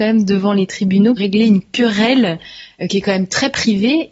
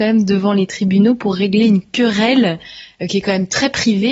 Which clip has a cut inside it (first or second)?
first